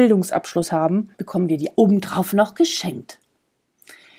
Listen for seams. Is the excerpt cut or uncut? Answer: cut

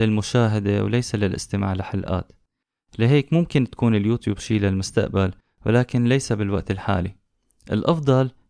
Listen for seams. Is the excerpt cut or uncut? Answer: uncut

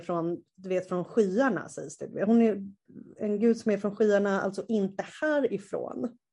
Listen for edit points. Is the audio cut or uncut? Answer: uncut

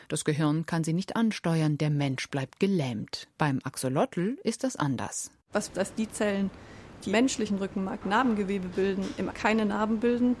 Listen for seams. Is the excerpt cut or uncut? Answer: cut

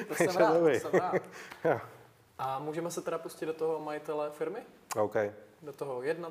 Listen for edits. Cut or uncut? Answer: uncut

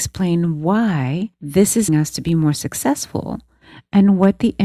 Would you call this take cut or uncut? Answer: cut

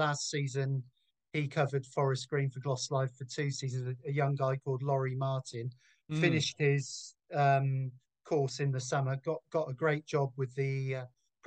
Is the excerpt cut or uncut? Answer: uncut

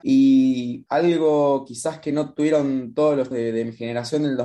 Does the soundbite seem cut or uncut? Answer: cut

